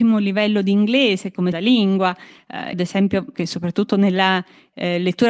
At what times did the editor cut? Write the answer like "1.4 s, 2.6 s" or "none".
1.5 s, 2.7 s, 3.3 s